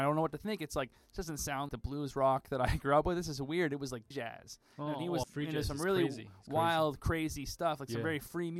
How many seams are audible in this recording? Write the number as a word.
three